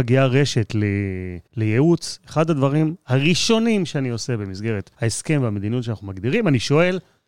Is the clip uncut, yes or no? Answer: no